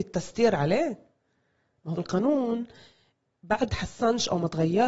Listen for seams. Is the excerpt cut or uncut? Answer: cut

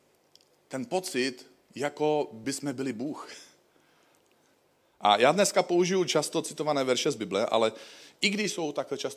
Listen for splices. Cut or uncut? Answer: uncut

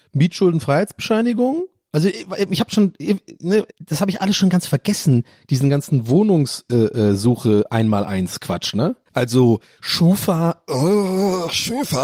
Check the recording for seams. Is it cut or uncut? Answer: cut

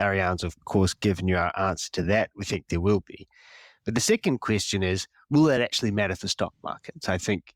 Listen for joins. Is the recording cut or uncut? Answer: uncut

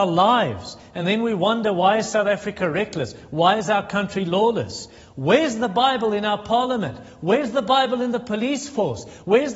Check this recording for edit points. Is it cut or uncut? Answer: uncut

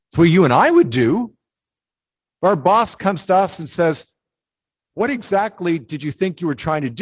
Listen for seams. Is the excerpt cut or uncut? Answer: uncut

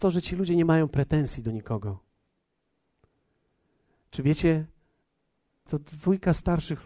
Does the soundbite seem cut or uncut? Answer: cut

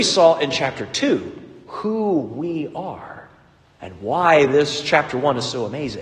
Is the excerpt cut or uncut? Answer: uncut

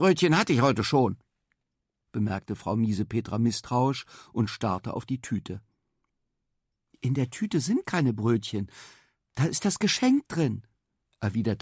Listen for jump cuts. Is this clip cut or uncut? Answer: uncut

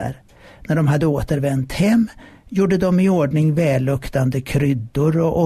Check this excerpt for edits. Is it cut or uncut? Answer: uncut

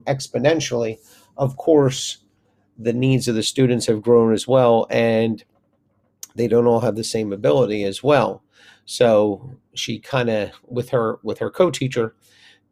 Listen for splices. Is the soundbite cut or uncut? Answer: uncut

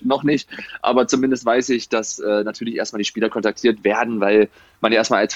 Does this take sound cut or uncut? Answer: uncut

